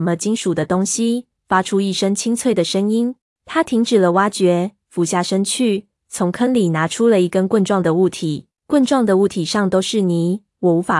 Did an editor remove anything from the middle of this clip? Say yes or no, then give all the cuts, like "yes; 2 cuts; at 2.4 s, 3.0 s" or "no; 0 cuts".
yes; 2 cuts; at 3.2 s, 8.6 s